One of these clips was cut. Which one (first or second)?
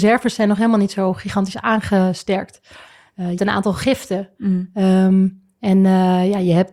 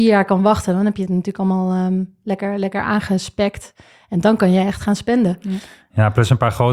first